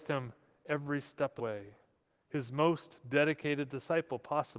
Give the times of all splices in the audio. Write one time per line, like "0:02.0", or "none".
0:01.4